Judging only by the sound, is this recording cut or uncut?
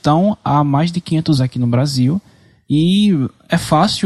cut